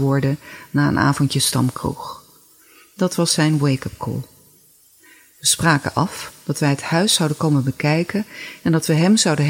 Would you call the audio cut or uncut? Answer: uncut